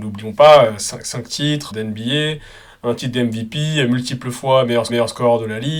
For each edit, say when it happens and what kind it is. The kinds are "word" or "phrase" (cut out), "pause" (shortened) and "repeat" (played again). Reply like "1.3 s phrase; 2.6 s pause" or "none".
1.7 s word; 4.9 s repeat